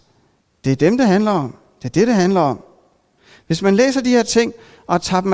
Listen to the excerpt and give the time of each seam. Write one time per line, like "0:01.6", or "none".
none